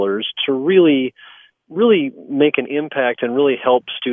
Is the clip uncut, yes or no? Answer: yes